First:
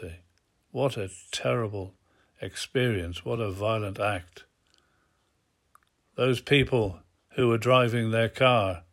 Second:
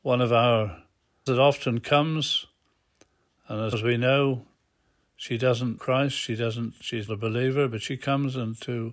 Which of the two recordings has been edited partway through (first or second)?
second